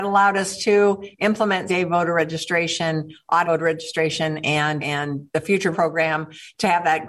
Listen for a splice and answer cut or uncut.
cut